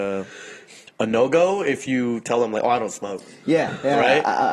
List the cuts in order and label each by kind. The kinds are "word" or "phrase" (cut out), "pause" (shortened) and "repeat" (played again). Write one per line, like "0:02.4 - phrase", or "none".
none

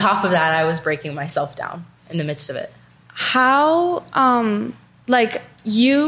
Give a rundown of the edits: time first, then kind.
none

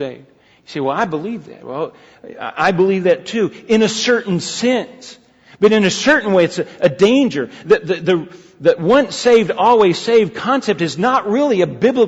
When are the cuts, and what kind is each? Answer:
none

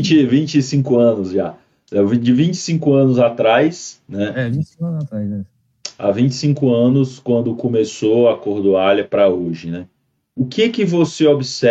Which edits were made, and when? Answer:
none

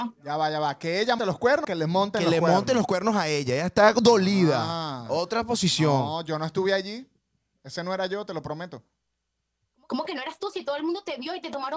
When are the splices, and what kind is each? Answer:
0:01.2 - word
0:01.6 - word

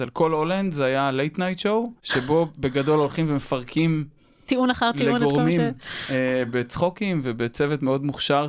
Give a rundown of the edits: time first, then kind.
0:02.0 - pause
0:04.2 - pause

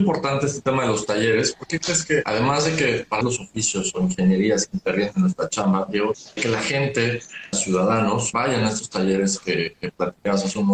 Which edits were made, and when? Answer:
0:03.2 - phrase
0:06.4 - word
0:07.5 - phrase

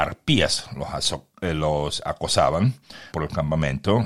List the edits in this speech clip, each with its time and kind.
0:03.1 - word

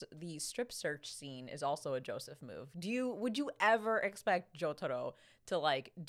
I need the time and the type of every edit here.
none

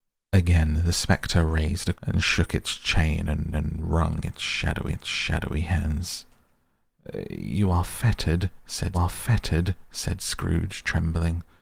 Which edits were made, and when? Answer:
0:01.9 - word
0:03.5 - repeat
0:04.9 - repeat
0:08.9 - repeat

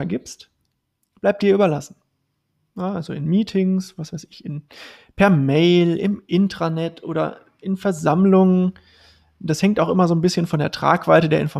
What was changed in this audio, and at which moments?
none

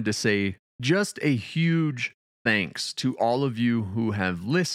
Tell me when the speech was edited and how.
none

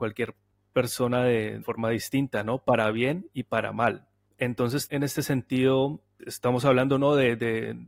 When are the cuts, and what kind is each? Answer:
0:01.6 - word
0:04.9 - word
0:06.2 - word

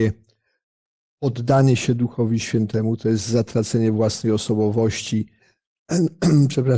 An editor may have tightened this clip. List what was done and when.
none

